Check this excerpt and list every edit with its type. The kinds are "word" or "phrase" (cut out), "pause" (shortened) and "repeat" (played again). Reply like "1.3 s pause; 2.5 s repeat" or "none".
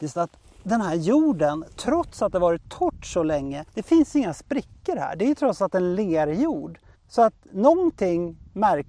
3.7 s pause; 6.9 s pause

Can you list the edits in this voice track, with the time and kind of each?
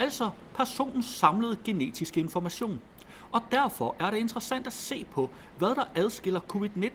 none

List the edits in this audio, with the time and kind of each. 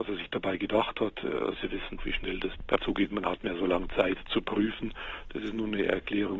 1.6 s word; 2.0 s word; 2.8 s word; 3.4 s phrase

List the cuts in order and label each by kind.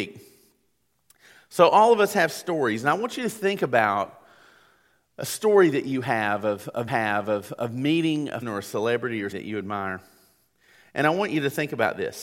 6.9 s repeat; 8.4 s phrase; 9.3 s word

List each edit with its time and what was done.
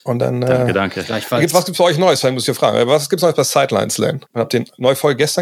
4.2 s pause

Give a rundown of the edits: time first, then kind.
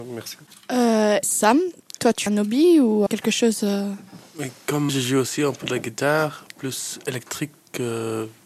1.2 s word; 2.3 s word; 3.1 s word; 4.9 s word

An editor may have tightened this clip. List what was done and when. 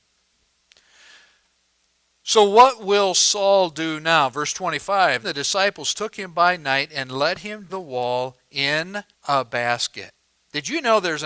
5.2 s word; 7.7 s phrase; 9.1 s pause

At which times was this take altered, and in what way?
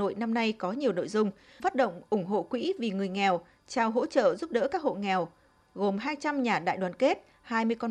1.6 s word

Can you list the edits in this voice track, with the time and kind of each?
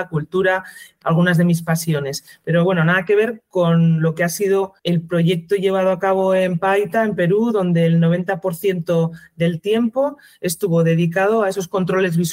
1.0 s word; 4.8 s pause

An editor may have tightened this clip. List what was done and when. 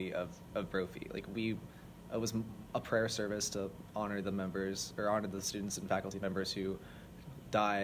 none

